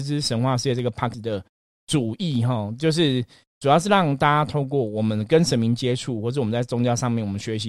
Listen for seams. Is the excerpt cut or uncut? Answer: cut